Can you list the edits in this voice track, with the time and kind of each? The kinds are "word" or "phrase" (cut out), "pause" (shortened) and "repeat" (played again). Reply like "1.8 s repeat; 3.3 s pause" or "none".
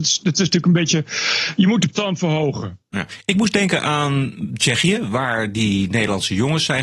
1.9 s word